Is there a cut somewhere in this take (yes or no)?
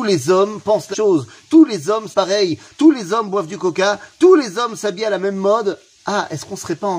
yes